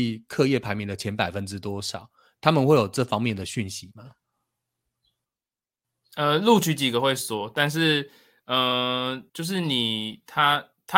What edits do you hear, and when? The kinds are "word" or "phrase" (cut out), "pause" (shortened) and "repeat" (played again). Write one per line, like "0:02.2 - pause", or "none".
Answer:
0:09.3 - pause

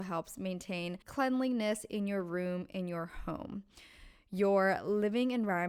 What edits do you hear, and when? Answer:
0:01.0 - pause

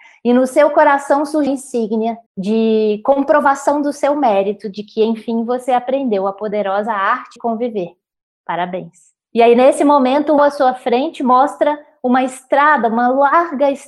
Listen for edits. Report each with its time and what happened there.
0:01.5 - word
0:02.3 - pause
0:07.4 - word
0:09.2 - pause
0:10.4 - phrase

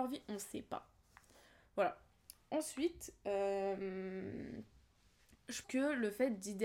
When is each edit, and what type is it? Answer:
0:05.6 - word

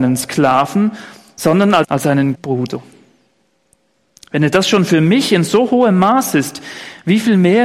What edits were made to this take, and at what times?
0:01.8 - phrase
0:02.3 - word

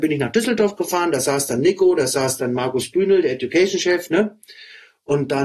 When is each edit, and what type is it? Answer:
none

